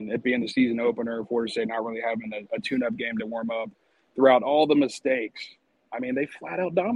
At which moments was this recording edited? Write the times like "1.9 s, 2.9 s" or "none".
none